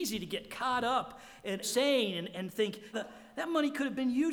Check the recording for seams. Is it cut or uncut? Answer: cut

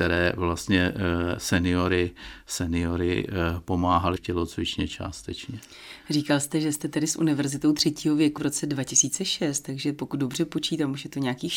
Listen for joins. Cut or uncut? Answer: cut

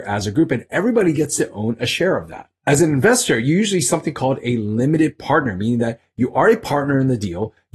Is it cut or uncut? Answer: uncut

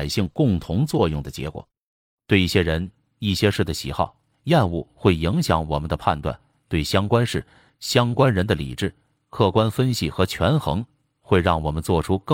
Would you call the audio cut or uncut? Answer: uncut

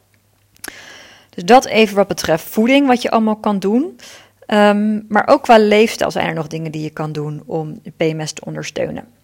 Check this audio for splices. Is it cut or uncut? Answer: uncut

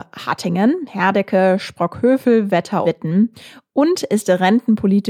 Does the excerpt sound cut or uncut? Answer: cut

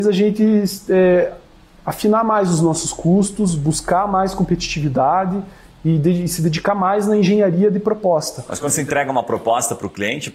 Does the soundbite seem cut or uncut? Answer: uncut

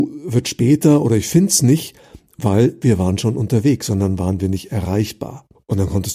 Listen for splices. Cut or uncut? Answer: uncut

